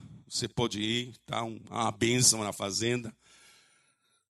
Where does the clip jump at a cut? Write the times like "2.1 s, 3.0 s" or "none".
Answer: none

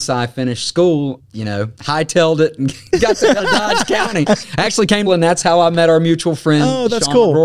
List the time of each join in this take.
1.2 s, 1.8 s, 3.4 s, 5.1 s

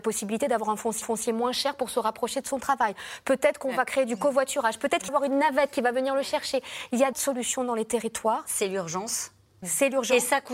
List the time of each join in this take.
1.0 s, 5.1 s, 7.1 s

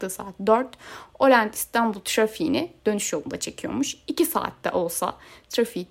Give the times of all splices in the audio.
none

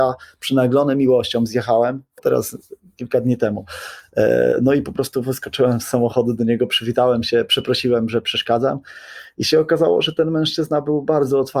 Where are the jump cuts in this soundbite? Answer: 2.2 s

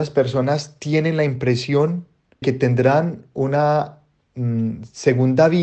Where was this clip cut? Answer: 2.4 s

